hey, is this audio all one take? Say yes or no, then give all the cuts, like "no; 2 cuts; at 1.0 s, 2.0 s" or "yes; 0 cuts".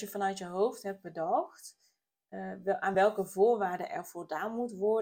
yes; 0 cuts